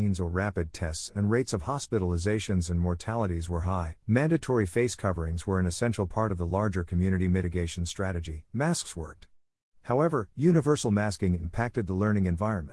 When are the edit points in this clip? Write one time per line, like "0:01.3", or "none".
0:04.0
0:08.5
0:10.3